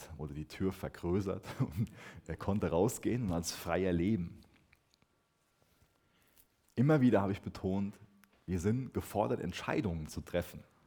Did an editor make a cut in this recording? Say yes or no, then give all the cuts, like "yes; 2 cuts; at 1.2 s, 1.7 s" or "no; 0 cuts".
no; 0 cuts